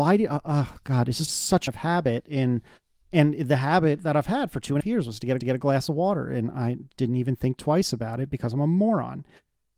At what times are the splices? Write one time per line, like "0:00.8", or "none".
0:01.3
0:01.7
0:04.8
0:05.4
0:06.9